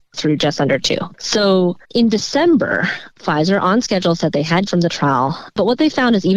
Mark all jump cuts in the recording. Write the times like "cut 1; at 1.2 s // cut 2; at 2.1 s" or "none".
cut 1; at 1.8 s // cut 2; at 3.1 s // cut 3; at 4.7 s